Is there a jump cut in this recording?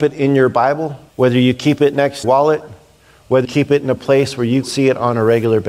yes; 4 cuts; at 1.1 s, 2.2 s, 3.4 s, 4.6 s

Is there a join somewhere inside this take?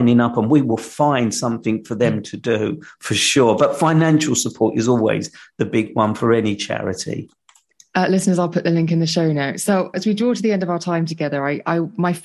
yes; 1 cut; at 9.9 s

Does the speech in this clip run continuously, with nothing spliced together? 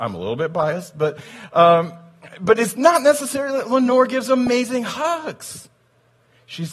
yes; 0 cuts

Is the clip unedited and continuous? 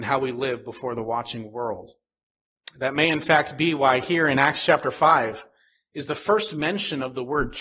yes; 0 cuts

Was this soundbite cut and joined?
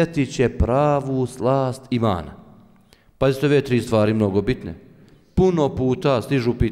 no; 0 cuts

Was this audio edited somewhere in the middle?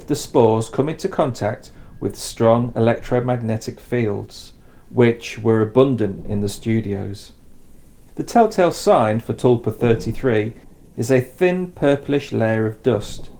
no; 0 cuts

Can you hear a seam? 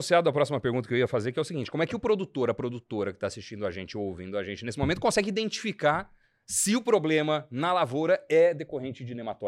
no; 0 cuts

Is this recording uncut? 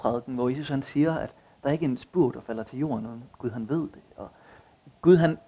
yes; 0 cuts

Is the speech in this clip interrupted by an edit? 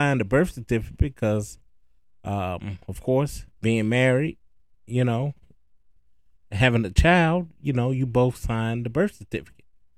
yes; 1 cut; at 3.5 s

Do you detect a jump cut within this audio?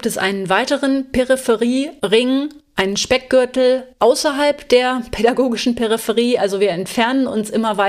no; 0 cuts

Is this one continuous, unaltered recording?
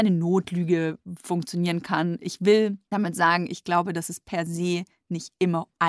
yes; 0 cuts

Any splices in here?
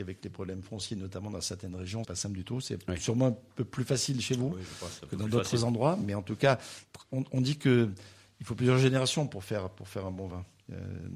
yes; 1 cut; at 2.0 s

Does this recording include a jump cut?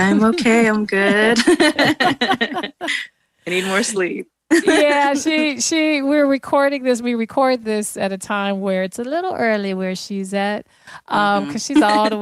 no; 0 cuts

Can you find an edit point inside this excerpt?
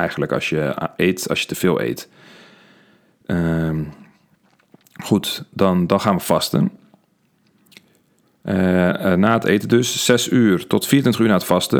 no; 0 cuts

